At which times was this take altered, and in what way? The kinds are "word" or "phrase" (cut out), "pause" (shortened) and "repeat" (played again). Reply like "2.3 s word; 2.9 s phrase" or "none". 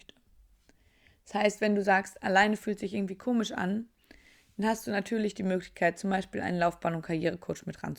none